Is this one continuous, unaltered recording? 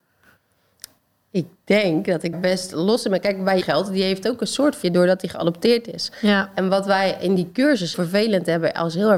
no; 4 cuts; at 2.3 s, 3.6 s, 4.8 s, 7.9 s

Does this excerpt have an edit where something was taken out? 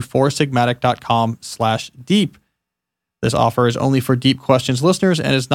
no; 0 cuts

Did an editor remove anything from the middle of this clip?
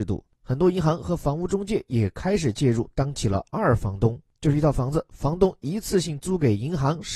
no; 0 cuts

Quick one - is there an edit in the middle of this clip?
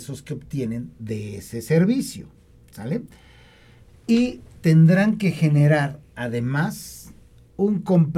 no; 0 cuts

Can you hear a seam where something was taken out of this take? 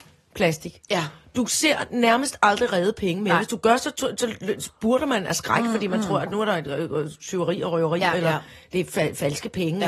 no; 0 cuts

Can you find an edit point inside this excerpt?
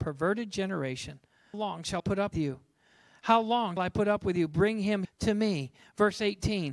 yes; 5 cuts; at 1.5 s, 2.0 s, 2.3 s, 3.8 s, 5.0 s

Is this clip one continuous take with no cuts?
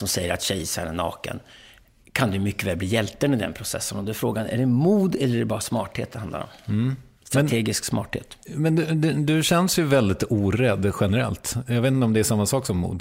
yes; 0 cuts

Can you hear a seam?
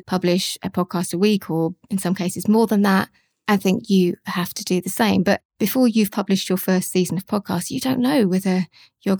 no; 0 cuts

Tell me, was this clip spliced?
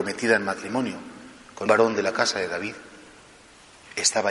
yes; 1 cut; at 1.7 s

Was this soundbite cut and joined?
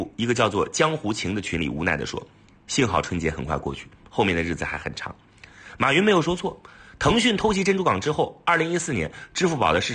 no; 0 cuts

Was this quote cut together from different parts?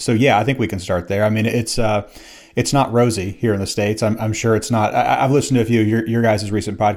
no; 0 cuts

